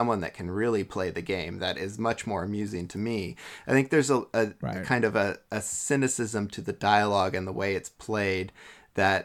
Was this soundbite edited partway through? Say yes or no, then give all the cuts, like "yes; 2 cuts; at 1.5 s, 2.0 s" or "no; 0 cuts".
no; 0 cuts